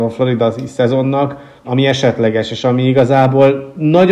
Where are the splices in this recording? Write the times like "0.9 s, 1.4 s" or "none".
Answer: 1.6 s